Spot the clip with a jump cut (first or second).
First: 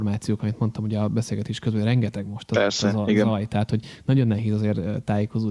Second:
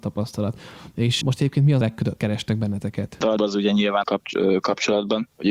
second